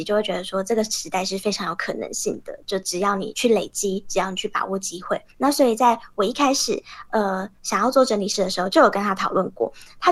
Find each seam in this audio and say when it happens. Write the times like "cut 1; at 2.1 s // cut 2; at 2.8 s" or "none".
cut 1; at 5.3 s